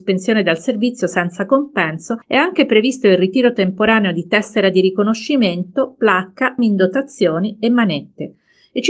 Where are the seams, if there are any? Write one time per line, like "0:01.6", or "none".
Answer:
0:02.2
0:06.6